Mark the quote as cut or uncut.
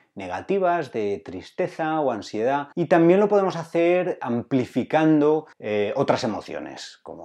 cut